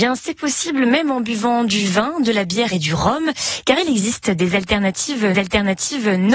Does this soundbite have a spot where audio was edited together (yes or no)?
yes